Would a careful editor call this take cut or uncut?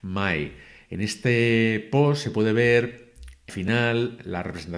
cut